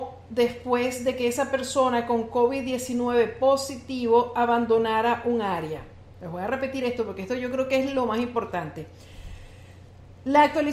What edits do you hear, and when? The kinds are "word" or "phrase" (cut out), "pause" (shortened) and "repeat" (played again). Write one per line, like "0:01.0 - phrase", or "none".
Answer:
none